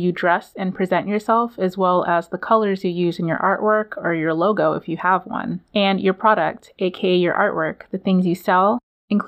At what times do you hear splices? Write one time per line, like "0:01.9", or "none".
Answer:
0:05.6